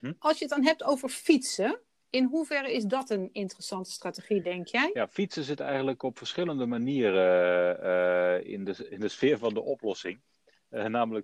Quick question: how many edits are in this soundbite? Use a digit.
0